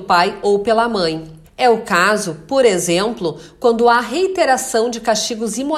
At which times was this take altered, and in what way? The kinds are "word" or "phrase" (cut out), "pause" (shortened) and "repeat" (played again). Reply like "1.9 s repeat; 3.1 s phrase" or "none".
1.4 s pause